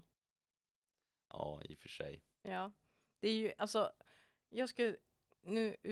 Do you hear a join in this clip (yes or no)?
no